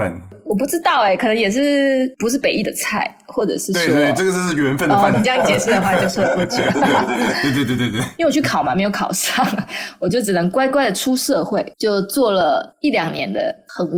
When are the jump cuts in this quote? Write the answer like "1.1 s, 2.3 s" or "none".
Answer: 5.1 s, 11.7 s